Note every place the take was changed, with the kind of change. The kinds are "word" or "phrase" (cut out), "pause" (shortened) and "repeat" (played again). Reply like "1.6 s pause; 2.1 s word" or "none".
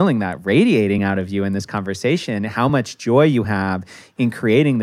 none